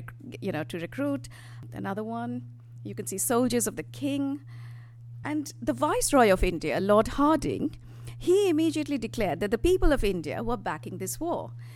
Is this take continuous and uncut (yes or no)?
yes